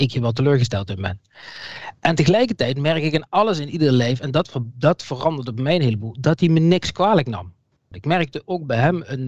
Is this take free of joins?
yes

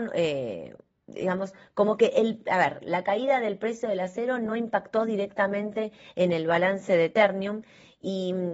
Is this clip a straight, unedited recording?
yes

